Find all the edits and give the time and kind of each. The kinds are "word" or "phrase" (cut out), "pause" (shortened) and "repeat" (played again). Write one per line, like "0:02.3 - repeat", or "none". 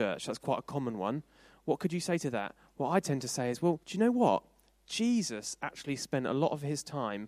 0:03.8 - pause